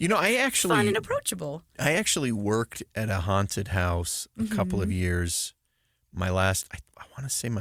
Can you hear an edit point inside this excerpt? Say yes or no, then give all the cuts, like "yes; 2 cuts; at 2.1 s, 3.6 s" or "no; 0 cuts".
no; 0 cuts